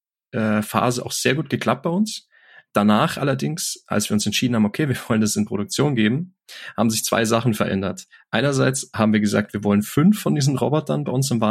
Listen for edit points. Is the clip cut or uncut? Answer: uncut